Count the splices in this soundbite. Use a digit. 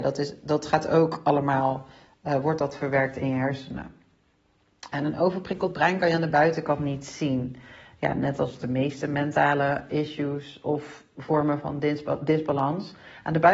1